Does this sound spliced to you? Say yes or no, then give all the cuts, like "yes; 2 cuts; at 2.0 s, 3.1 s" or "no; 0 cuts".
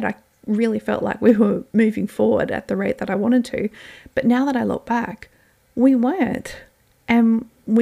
no; 0 cuts